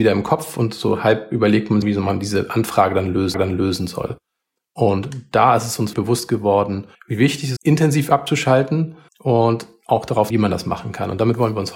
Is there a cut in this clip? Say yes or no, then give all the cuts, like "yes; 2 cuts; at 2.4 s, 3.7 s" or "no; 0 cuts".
yes; 7 cuts; at 1.8 s, 3.3 s, 5.9 s, 6.9 s, 7.6 s, 9.1 s, 10.3 s